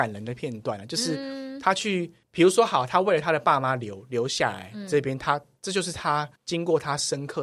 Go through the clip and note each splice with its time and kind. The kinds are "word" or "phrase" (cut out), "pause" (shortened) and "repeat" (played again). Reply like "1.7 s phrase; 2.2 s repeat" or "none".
2.2 s pause; 6.4 s pause